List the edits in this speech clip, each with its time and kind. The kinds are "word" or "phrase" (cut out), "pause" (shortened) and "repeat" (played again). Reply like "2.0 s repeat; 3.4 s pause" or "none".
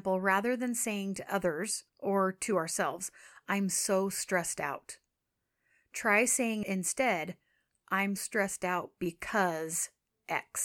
1.9 s pause; 8.2 s word